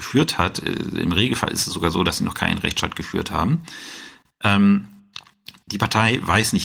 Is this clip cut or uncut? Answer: uncut